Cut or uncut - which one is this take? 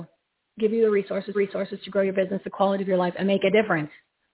cut